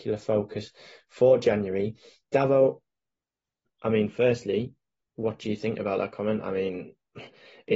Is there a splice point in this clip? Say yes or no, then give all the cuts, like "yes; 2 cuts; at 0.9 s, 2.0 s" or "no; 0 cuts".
no; 0 cuts